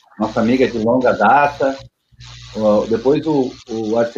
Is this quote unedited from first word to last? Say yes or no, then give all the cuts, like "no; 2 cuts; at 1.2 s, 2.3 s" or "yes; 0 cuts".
yes; 0 cuts